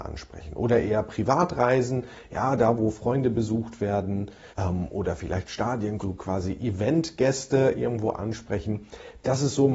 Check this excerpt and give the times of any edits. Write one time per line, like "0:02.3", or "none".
0:04.5
0:06.0